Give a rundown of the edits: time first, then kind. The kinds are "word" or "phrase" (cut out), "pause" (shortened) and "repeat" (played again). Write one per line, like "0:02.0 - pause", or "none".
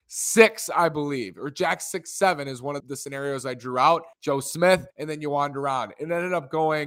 0:02.8 - word
0:04.1 - pause
0:04.9 - pause